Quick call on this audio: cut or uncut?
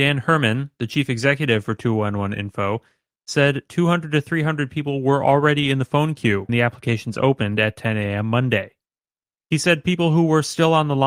cut